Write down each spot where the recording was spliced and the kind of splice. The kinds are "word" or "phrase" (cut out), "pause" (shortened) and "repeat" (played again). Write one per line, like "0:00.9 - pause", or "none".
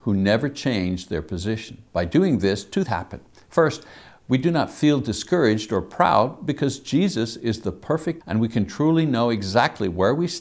0:01.9 - pause
0:02.9 - word
0:08.2 - word